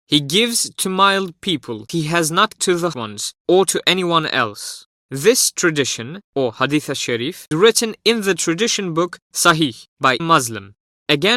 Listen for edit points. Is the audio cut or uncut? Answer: cut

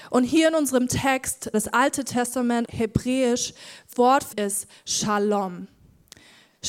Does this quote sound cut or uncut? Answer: cut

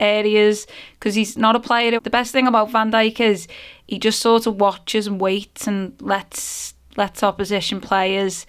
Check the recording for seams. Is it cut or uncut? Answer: cut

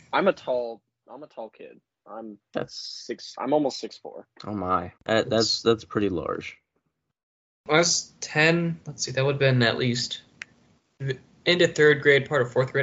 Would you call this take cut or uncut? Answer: cut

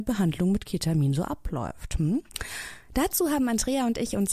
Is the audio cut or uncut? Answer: uncut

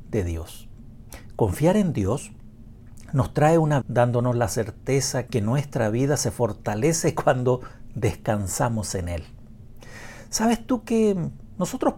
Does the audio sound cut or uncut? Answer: cut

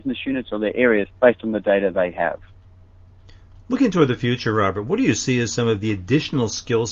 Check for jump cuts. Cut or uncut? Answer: cut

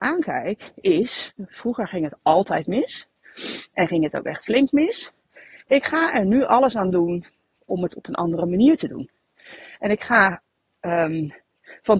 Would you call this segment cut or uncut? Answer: uncut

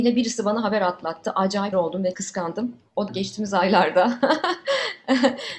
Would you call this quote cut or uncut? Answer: cut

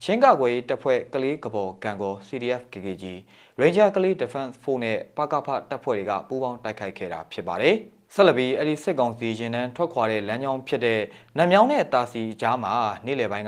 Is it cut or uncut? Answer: uncut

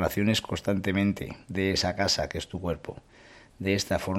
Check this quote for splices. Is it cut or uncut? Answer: cut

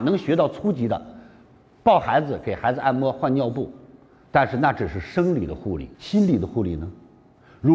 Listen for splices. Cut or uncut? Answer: cut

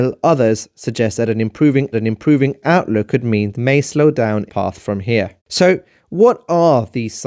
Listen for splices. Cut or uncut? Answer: cut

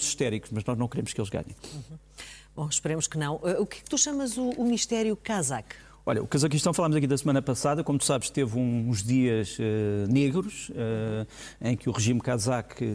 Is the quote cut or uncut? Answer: uncut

